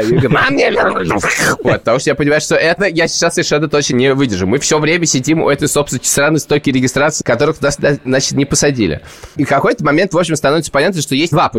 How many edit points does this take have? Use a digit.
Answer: 1